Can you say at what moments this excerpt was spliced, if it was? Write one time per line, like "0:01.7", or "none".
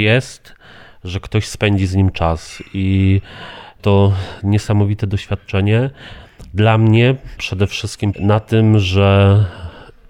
0:08.1